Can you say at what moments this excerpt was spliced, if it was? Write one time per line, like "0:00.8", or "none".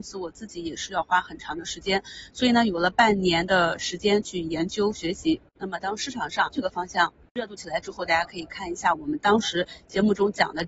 0:06.5